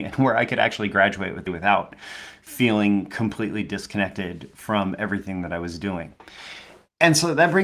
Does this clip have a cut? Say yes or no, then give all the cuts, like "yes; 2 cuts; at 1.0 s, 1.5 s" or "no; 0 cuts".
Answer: yes; 1 cut; at 1.5 s